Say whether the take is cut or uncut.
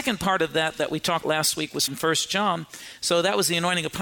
cut